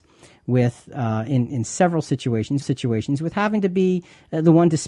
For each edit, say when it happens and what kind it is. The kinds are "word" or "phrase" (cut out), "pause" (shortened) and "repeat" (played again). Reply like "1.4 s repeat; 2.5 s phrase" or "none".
2.6 s repeat